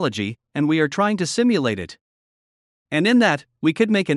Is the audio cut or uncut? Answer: uncut